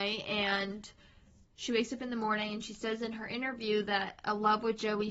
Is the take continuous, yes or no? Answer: yes